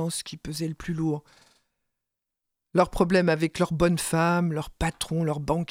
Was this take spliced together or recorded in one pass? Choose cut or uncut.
uncut